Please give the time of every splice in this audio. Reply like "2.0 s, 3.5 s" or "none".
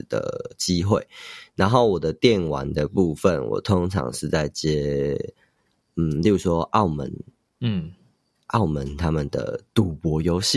none